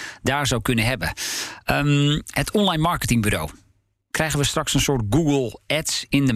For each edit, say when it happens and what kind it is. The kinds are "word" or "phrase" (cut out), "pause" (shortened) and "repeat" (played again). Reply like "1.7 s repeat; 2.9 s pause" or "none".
none